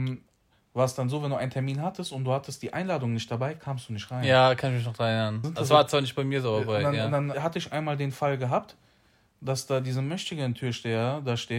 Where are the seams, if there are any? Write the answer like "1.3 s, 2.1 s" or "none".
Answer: 5.4 s, 7.3 s